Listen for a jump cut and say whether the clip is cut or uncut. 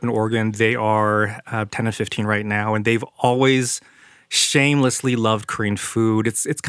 uncut